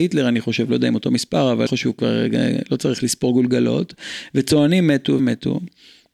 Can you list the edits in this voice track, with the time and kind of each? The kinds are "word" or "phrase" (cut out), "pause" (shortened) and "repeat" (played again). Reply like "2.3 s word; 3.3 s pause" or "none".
1.7 s word; 5.2 s word